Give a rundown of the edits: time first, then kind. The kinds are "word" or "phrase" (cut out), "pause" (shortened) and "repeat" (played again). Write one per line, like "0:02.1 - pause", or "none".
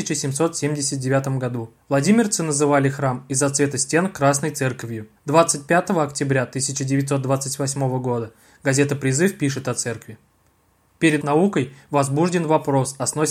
0:01.8 - pause
0:05.2 - pause
0:11.2 - word